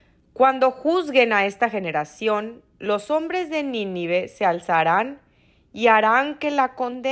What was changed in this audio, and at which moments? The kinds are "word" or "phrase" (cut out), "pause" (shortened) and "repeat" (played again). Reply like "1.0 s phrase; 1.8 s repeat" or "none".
none

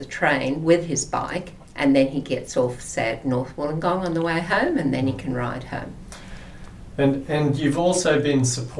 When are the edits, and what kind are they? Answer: 1.6 s pause

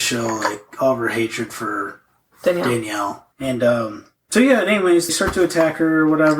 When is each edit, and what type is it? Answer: 3.3 s pause; 5.1 s phrase

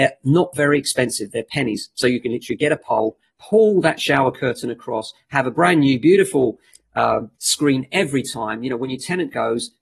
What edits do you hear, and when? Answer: 3.3 s pause; 7.3 s pause

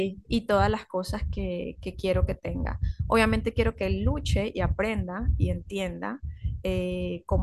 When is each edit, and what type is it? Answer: none

